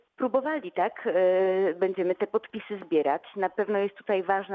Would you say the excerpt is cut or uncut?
uncut